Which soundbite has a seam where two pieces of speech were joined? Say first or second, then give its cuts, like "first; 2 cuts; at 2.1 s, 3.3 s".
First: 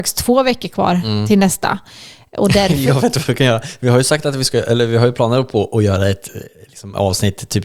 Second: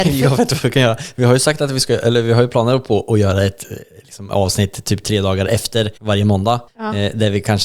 second; 2 cuts; at 6.0 s, 6.7 s